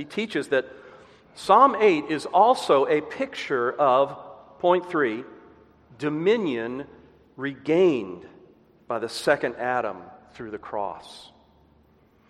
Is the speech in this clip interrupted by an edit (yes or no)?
no